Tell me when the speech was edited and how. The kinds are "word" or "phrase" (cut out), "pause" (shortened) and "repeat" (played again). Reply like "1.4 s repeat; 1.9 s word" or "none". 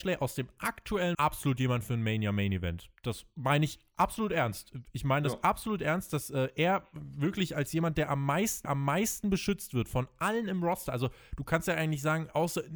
1.1 s phrase; 8.6 s repeat